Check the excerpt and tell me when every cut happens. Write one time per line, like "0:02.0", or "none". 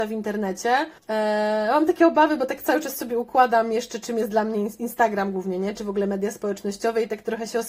0:01.0